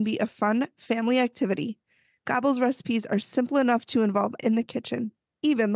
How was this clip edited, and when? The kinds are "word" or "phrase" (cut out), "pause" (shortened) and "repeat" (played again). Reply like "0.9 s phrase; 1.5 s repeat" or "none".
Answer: 4.4 s word